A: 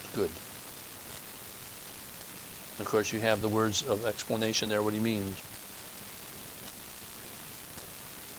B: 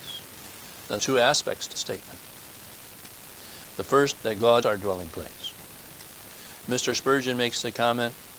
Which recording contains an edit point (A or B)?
B